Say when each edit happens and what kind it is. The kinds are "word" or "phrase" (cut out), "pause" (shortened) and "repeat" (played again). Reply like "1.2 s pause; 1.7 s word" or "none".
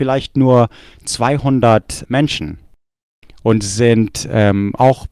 2.0 s word